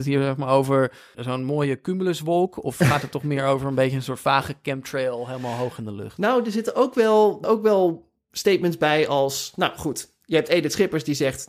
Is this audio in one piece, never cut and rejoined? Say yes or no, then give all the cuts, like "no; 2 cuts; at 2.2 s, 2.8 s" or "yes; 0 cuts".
no; 2 cuts; at 1.1 s, 7.4 s